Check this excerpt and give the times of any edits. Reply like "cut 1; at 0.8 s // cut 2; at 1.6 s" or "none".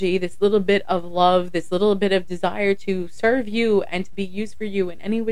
none